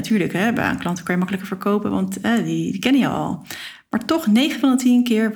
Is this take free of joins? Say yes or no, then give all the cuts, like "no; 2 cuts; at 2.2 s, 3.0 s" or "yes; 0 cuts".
yes; 0 cuts